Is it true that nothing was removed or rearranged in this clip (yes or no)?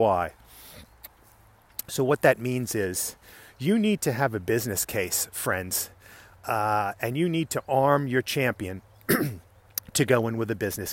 yes